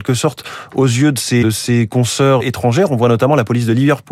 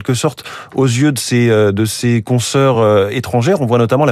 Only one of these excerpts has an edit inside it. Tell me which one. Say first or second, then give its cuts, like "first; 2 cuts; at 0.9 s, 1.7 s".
first; 2 cuts; at 1.4 s, 2.4 s